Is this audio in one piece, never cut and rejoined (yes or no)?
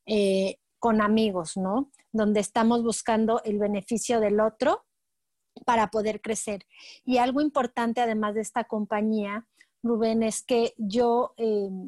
yes